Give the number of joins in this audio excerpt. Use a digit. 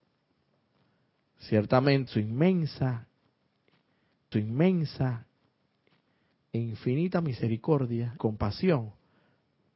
3